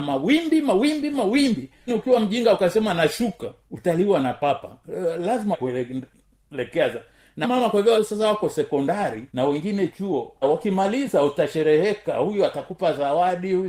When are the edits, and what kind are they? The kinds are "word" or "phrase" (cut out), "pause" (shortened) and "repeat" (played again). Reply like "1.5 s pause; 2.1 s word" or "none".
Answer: 1.9 s word; 3.6 s pause; 5.5 s word; 7.4 s word; 7.9 s word; 9.3 s pause; 10.4 s word

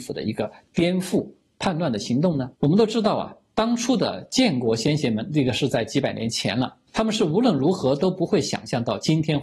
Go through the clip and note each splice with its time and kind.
2.5 s pause; 6.9 s pause

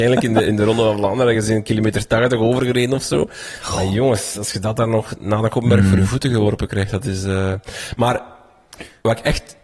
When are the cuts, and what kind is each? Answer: none

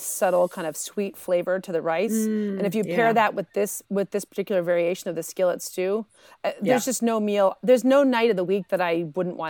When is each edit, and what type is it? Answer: none

